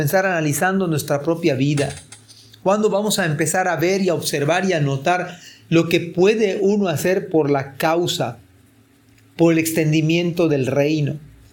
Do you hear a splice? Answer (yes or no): no